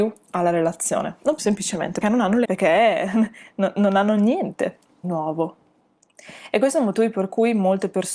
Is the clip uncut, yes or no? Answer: no